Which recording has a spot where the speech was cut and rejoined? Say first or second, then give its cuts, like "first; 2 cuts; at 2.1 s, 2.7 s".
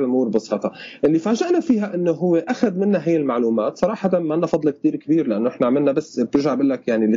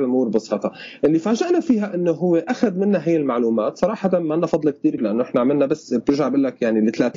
second; 1 cut; at 5.0 s